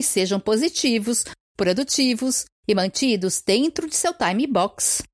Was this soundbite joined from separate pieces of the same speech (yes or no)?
no